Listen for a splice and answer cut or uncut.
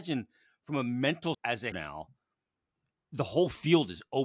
cut